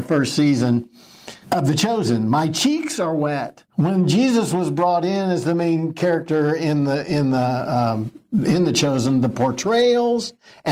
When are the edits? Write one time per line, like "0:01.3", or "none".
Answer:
0:01.4
0:03.7